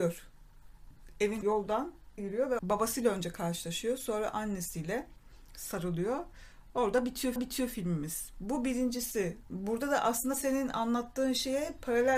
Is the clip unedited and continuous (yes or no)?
no